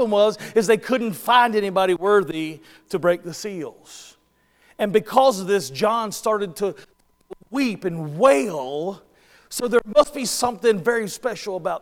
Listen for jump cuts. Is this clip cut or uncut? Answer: uncut